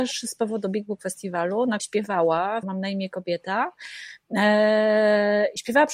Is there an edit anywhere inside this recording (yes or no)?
yes